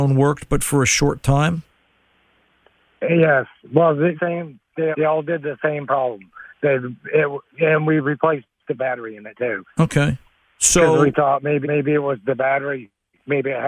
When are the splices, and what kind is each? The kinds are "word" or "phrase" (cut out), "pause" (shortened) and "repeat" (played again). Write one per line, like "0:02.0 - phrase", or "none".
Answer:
0:04.2 - phrase
0:04.9 - word
0:06.5 - pause
0:08.8 - phrase
0:09.7 - pause
0:11.6 - repeat